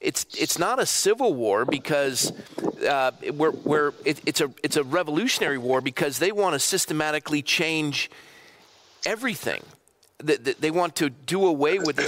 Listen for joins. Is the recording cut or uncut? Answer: uncut